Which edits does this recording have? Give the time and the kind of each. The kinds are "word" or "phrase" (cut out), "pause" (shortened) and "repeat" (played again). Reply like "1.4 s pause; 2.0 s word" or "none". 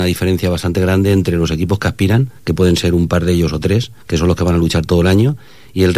2.4 s pause; 4.0 s pause